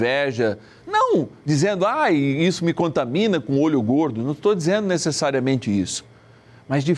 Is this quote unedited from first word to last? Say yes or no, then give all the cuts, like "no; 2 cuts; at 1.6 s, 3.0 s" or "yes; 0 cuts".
yes; 0 cuts